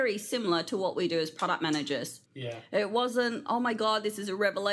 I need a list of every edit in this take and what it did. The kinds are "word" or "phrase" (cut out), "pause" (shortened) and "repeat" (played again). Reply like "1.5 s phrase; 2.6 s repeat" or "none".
2.3 s pause

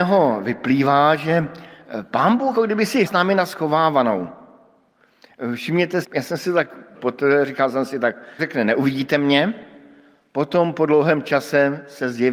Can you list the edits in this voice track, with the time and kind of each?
2.5 s word; 3.1 s word; 6.0 s word; 6.9 s word; 8.4 s word

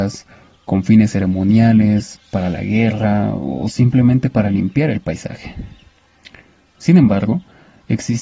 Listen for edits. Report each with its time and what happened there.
none

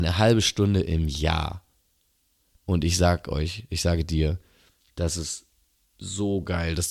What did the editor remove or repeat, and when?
none

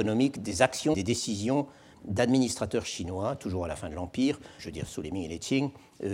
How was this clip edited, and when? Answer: 0.9 s word; 4.6 s word

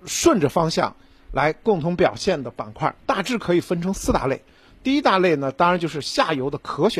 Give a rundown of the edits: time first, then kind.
3.0 s pause

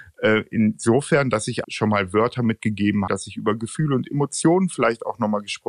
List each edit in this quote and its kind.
1.6 s word; 3.1 s word

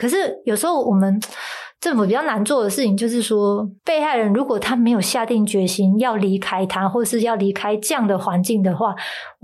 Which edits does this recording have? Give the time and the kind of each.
3.8 s pause

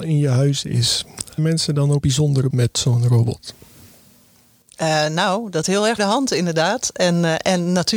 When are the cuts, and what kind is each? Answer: 1.4 s word; 2.0 s word; 2.5 s word; 5.6 s word; 6.0 s word

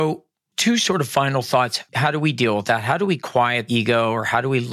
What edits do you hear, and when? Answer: 3.7 s word

